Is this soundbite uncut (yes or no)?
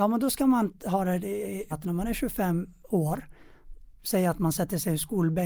no